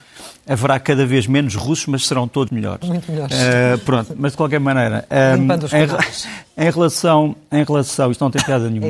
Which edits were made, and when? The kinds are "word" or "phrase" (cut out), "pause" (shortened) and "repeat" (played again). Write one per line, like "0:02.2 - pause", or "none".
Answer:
0:02.5 - word